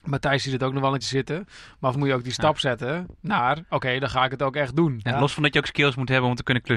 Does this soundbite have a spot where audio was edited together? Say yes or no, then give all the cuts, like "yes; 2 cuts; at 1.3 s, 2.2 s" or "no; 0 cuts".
yes; 2 cuts; at 1.0 s, 1.9 s